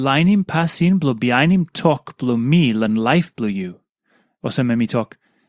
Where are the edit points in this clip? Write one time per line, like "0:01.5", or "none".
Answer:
none